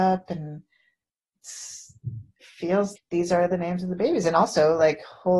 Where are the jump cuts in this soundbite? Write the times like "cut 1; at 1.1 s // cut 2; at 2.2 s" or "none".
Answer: cut 1; at 2.4 s // cut 2; at 3.0 s